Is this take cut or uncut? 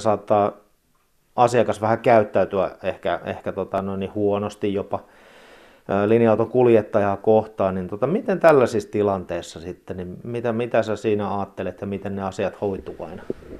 uncut